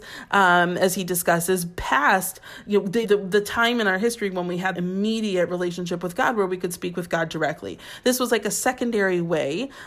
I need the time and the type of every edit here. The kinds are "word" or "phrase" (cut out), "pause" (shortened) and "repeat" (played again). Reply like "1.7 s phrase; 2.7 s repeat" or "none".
3.0 s word; 4.7 s word